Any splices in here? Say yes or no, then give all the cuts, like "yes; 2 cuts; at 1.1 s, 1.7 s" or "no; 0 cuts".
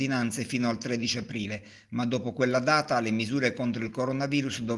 no; 0 cuts